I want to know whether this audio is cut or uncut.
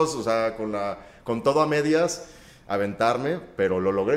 uncut